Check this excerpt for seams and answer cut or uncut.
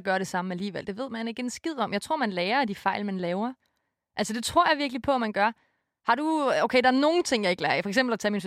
uncut